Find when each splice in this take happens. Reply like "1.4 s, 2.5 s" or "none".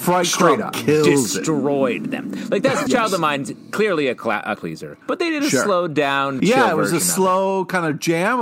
2.9 s, 4.6 s, 5.0 s, 6.4 s